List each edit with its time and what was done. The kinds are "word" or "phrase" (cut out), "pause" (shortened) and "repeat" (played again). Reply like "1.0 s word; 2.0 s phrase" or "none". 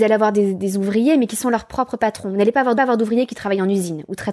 2.7 s repeat